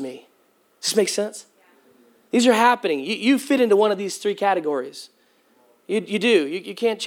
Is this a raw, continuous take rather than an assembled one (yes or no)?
yes